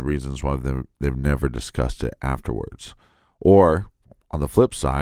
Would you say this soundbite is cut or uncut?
uncut